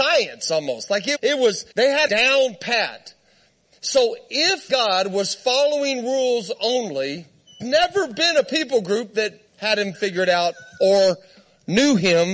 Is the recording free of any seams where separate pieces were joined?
no; 6 cuts; at 1.1 s, 1.7 s, 2.1 s, 4.7 s, 7.6 s, 9.5 s

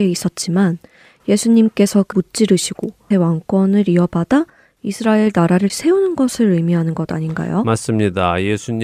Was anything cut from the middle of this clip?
yes; 3 cuts; at 2.1 s, 3.1 s, 5.7 s

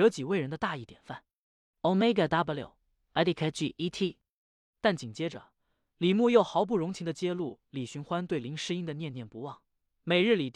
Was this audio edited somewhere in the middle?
yes; 1 cut; at 2.3 s

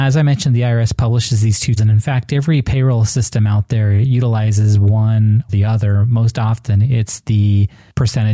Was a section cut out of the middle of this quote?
yes; 2 cuts; at 1.8 s, 5.5 s

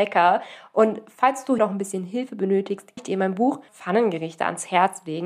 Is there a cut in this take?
yes; 3 cuts; at 1.6 s, 3.0 s, 3.7 s

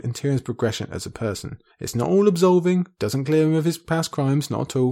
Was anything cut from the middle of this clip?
no; 0 cuts

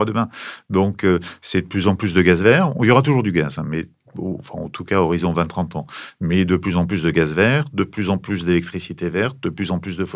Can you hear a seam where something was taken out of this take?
no; 0 cuts

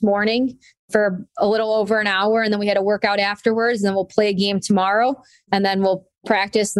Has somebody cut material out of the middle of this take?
no; 0 cuts

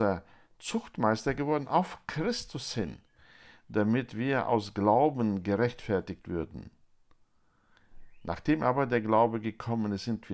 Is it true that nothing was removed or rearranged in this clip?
yes; 0 cuts

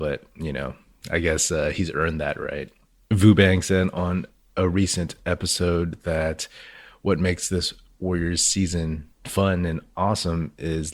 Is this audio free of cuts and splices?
yes; 0 cuts

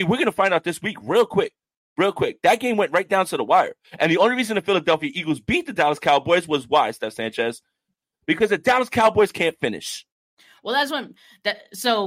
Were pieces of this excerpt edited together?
no; 0 cuts

